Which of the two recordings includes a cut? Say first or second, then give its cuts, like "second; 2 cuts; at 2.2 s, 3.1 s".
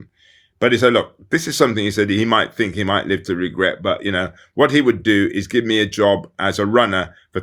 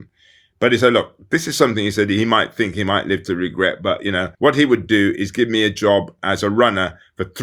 second; 1 cut; at 4.3 s